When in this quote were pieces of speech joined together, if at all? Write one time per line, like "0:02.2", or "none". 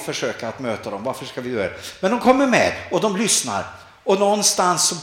none

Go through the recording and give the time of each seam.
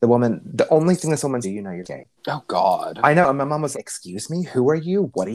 0:01.4
0:01.8
0:02.2
0:03.7

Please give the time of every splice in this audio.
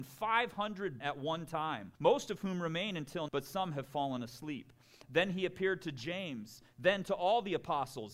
0:01.0
0:01.9
0:03.3

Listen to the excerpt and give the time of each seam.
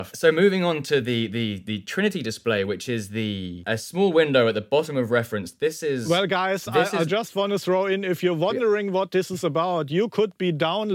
none

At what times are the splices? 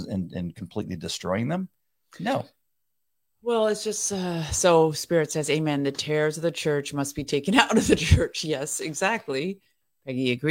none

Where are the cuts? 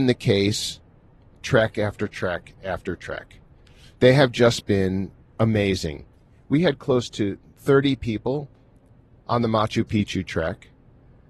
none

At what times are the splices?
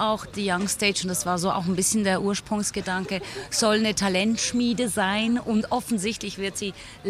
none

